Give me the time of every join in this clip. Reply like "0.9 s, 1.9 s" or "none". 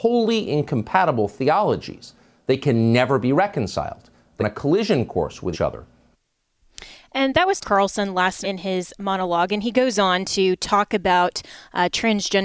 4.4 s, 5.5 s, 7.6 s, 8.4 s